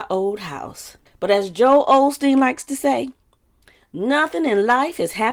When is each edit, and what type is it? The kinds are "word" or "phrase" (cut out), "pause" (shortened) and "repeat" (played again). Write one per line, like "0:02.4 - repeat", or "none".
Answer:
none